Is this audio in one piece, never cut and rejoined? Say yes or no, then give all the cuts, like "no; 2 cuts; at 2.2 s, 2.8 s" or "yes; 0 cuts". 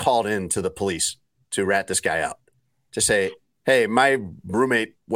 yes; 0 cuts